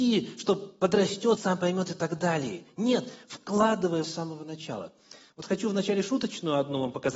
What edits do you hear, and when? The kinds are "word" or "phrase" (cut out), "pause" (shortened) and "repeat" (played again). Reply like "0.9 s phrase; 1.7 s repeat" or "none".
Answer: 1.4 s word; 4.0 s word